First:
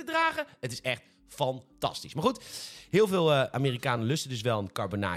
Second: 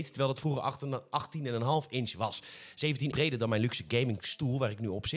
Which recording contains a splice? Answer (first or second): second